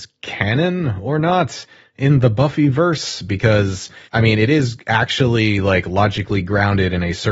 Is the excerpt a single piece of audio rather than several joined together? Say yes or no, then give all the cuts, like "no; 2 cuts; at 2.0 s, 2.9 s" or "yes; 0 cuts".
no; 1 cut; at 4.1 s